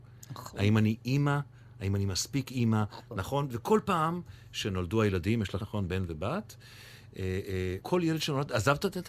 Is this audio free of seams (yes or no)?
no